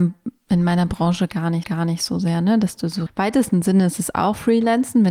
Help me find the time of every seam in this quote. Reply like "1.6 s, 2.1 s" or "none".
1.6 s, 3.1 s

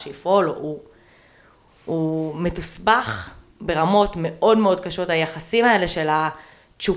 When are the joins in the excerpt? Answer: none

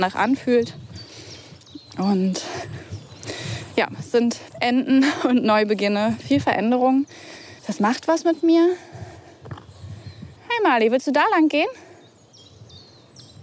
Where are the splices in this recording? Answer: 4.5 s, 7.6 s, 10.4 s

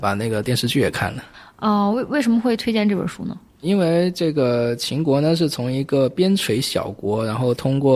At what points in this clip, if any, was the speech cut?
none

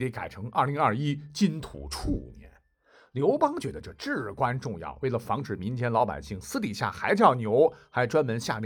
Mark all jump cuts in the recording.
none

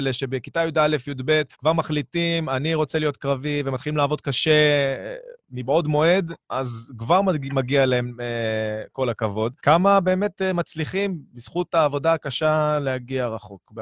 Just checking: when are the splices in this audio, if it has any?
1.5 s, 6.4 s, 9.6 s

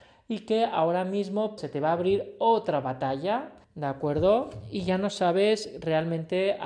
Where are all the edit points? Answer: 1.6 s, 3.6 s

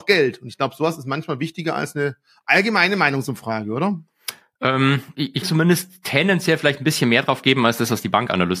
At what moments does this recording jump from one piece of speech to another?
5.4 s

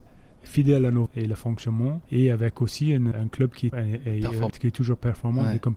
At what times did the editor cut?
1.1 s, 2.1 s, 3.1 s, 3.7 s, 4.5 s

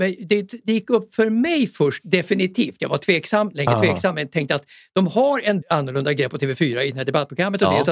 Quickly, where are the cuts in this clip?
5.6 s

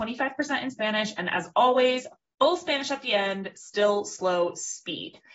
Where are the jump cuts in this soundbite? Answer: none

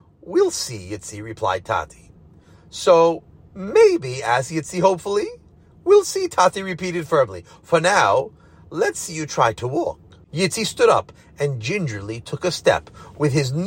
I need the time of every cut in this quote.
none

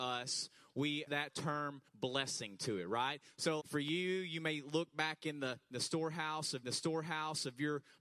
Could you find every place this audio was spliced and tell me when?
1.1 s, 1.9 s, 3.6 s, 6.6 s

